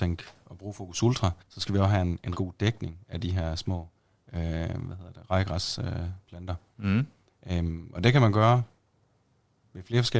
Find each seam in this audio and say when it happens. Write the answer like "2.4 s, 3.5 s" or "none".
1.4 s, 2.3 s